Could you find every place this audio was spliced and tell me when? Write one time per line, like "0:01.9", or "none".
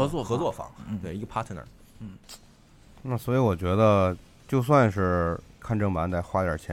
0:05.6